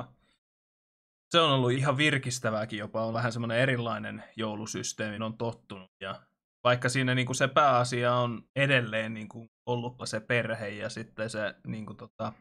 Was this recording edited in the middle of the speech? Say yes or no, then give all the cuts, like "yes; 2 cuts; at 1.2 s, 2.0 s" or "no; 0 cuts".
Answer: yes; 5 cuts; at 1.7 s, 3.1 s, 5.2 s, 8.5 s, 10.0 s